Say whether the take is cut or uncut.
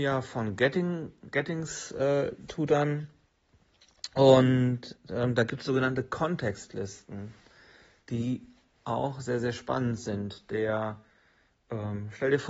uncut